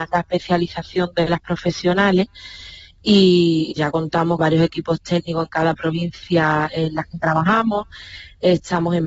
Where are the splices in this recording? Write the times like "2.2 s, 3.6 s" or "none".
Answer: 3.7 s, 4.4 s